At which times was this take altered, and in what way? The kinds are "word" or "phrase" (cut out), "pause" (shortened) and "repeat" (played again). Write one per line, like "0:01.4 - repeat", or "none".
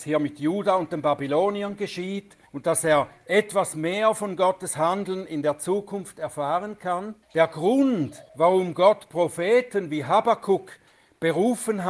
0:02.5 - pause
0:07.2 - pause
0:08.3 - pause